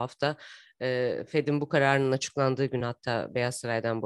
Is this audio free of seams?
yes; 0 cuts

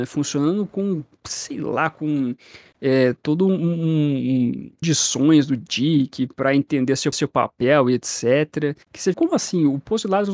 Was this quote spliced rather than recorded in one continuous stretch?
yes; 4 cuts; at 4.8 s, 7.1 s, 8.8 s, 9.1 s

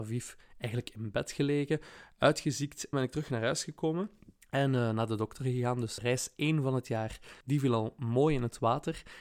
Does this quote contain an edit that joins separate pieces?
yes; 4 cuts; at 2.9 s, 4.4 s, 6.0 s, 7.4 s

